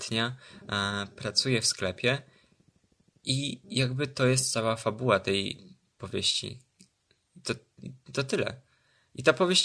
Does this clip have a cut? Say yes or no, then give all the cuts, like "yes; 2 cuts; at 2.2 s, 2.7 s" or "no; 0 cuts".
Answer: no; 0 cuts